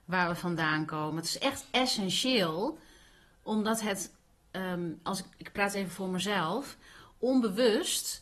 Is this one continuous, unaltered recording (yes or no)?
yes